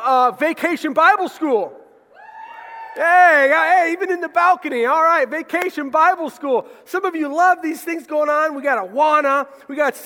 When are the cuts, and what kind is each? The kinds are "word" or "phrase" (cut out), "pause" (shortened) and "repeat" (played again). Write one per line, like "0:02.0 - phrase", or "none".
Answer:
none